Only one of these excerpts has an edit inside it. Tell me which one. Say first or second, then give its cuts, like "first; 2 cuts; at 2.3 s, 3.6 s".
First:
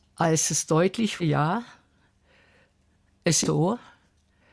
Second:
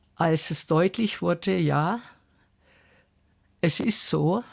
first; 2 cuts; at 1.2 s, 3.4 s